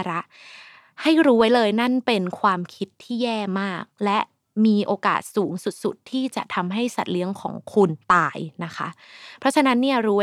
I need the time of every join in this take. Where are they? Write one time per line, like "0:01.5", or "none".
0:08.0